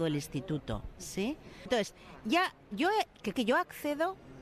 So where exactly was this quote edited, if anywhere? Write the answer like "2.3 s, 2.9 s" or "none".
2.7 s, 3.3 s